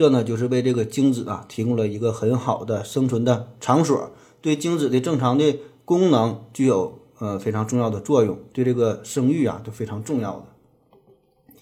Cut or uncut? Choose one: uncut